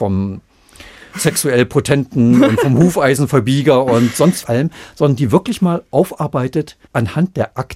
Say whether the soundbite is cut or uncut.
cut